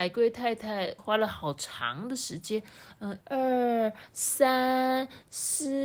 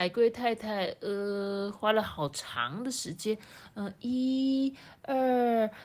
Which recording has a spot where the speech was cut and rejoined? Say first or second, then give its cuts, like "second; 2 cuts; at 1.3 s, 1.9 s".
first; 2 cuts; at 1.0 s, 3.2 s